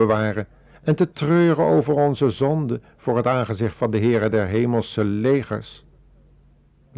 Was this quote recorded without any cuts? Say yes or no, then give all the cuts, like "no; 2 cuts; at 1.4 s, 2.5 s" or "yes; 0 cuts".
yes; 0 cuts